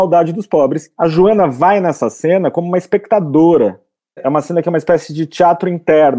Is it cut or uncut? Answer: uncut